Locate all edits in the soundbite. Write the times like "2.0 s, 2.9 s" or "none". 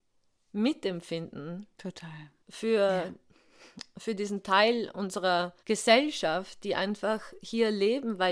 2.4 s, 5.6 s